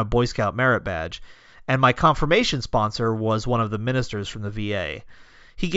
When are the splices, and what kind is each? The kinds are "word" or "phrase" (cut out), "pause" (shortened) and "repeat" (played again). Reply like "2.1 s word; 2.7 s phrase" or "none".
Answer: none